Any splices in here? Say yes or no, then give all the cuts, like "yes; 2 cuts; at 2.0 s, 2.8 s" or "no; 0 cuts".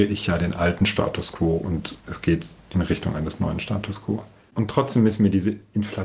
yes; 1 cut; at 2.0 s